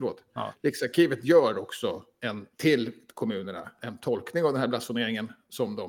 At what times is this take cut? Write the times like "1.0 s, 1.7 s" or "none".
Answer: 2.5 s